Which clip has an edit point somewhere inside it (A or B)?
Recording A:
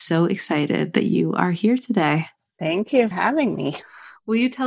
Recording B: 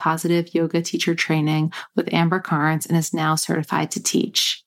A